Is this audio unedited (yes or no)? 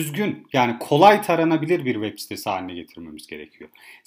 yes